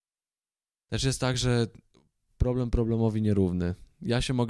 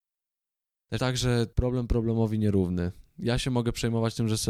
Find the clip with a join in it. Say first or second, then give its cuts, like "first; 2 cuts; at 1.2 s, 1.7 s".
second; 2 cuts; at 1.0 s, 1.5 s